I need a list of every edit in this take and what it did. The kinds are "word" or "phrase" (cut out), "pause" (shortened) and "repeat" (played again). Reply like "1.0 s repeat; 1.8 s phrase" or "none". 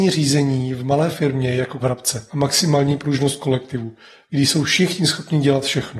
1.8 s phrase; 2.3 s phrase